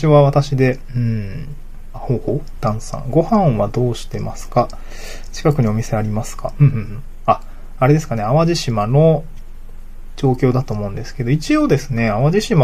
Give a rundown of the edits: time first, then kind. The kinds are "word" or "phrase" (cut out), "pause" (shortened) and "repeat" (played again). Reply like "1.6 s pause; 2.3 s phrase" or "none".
1.9 s word

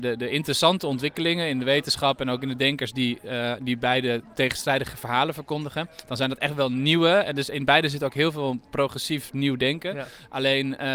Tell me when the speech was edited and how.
none

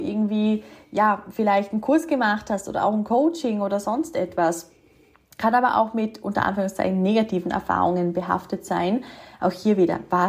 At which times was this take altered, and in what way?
none

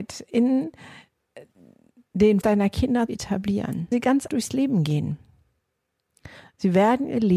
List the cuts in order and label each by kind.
2.4 s word; 3.1 s word; 3.9 s word; 4.3 s word

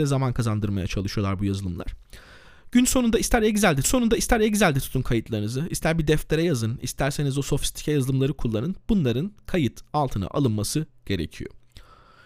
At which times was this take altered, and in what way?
3.8 s repeat

